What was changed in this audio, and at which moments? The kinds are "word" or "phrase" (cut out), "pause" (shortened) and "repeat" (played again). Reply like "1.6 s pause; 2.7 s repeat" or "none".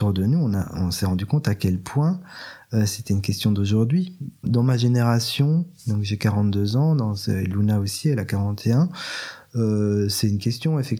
none